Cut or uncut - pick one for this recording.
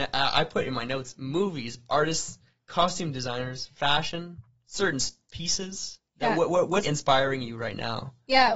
cut